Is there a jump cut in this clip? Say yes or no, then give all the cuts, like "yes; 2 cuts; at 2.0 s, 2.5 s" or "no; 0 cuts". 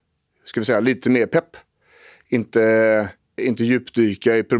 yes; 1 cut; at 3.4 s